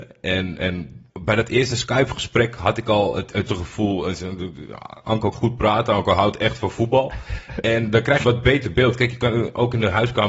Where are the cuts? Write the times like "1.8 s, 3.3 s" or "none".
1.1 s, 3.5 s, 5.3 s, 8.2 s